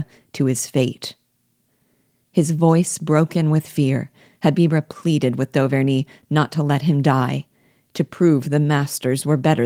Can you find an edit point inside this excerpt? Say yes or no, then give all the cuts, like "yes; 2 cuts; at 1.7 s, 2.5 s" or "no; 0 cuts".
no; 0 cuts